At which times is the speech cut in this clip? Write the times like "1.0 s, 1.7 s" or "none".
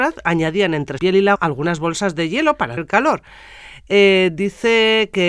1.0 s, 1.3 s, 2.8 s

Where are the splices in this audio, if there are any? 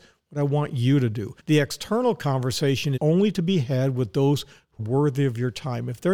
1.4 s, 3.0 s, 4.8 s

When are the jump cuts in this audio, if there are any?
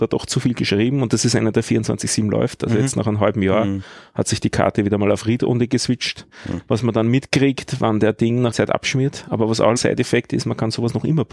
8.5 s, 9.8 s

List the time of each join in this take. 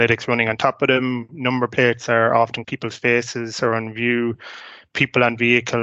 2.6 s

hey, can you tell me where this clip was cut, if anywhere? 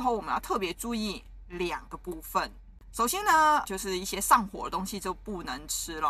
3.7 s

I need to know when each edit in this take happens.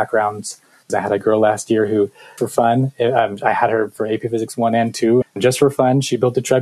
2.4 s, 5.2 s

